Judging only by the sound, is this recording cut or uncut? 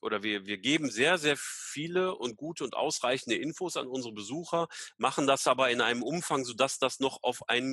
uncut